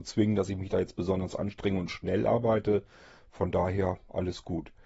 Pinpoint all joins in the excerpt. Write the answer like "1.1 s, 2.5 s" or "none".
none

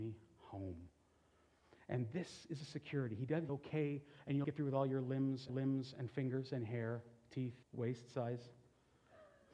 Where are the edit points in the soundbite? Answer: 3.5 s, 4.4 s, 5.5 s, 7.6 s

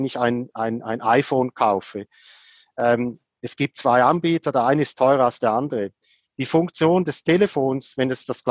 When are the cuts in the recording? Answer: none

